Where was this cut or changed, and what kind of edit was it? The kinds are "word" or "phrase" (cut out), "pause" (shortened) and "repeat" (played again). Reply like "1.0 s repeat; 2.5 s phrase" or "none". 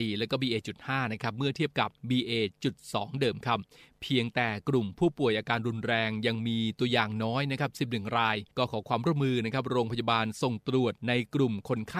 2.0 s pause; 8.5 s pause; 11.0 s pause